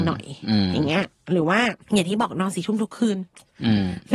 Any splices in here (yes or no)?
yes